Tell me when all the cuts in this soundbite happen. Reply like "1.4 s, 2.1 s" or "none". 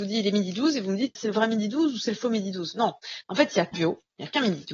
1.2 s, 3.7 s